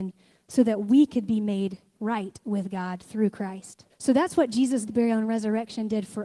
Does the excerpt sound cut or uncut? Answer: cut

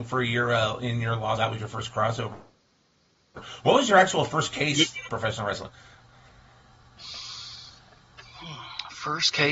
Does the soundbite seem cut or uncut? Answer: cut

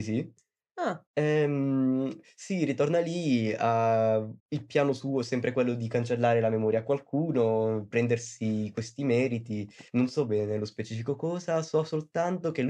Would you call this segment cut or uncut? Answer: cut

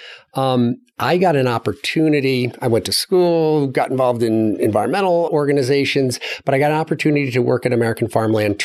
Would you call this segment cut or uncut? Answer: cut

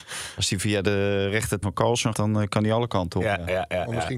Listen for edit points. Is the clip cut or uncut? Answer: cut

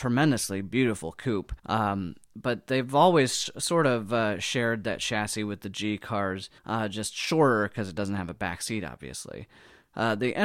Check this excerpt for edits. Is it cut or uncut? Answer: cut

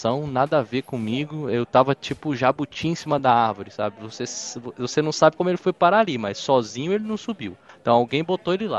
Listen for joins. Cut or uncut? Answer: uncut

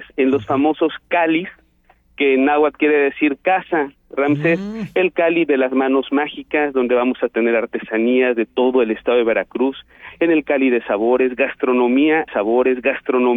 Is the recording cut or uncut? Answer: cut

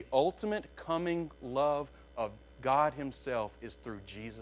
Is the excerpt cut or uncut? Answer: uncut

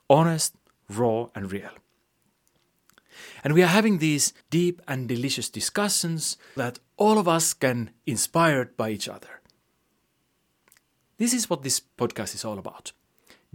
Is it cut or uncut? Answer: cut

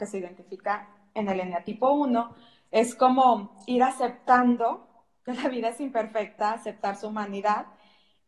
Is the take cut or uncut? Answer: uncut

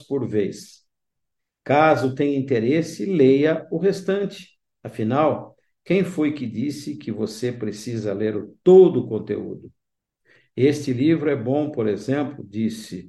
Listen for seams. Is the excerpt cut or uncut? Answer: uncut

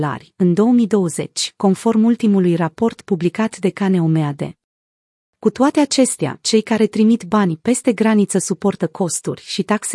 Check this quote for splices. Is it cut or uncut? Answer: uncut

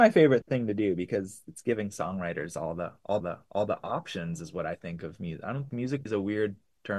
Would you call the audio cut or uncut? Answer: cut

